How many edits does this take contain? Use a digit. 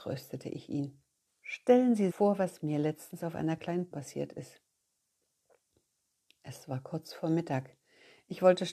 3